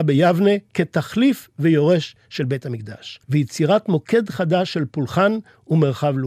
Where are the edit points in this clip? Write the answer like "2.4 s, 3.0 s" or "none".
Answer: 3.2 s